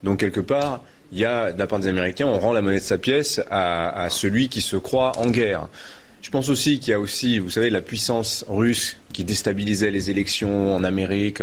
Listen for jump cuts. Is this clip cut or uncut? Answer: uncut